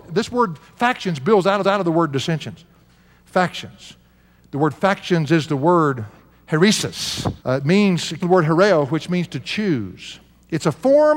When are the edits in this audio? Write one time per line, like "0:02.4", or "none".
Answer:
0:01.6
0:07.4
0:08.2